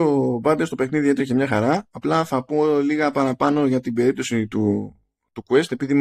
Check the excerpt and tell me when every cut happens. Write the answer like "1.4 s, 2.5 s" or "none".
none

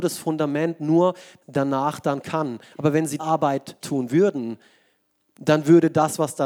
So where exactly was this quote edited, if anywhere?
1.4 s, 2.2 s, 3.2 s, 3.8 s

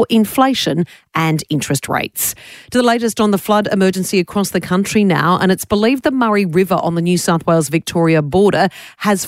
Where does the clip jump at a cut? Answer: none

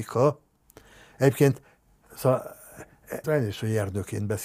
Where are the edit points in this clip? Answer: 3.2 s

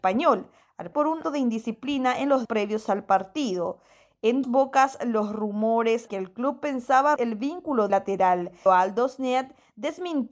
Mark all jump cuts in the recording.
0.9 s, 1.2 s, 2.4 s, 4.4 s, 6.1 s, 7.2 s, 7.9 s, 8.7 s

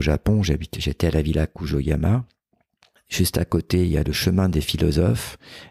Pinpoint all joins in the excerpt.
none

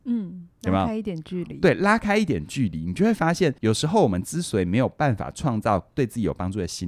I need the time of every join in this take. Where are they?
3.6 s

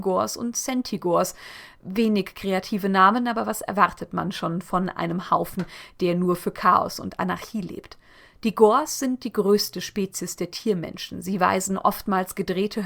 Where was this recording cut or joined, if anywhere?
none

